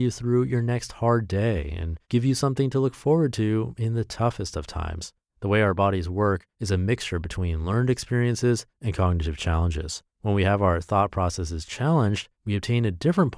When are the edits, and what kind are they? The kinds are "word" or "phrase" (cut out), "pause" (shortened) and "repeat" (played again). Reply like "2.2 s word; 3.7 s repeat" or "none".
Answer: 2.0 s pause; 5.3 s pause; 6.5 s pause; 8.7 s pause; 10.1 s pause; 12.3 s pause

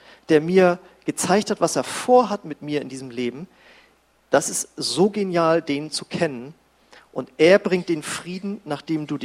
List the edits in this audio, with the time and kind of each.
none

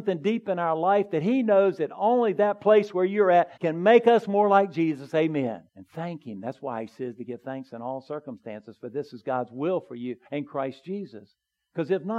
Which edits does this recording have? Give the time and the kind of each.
3.6 s pause; 5.7 s pause; 10.3 s pause

